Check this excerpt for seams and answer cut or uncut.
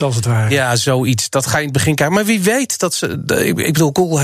uncut